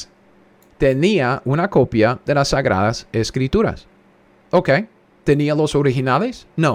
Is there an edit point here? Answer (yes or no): no